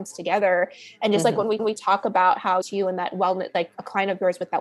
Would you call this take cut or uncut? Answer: cut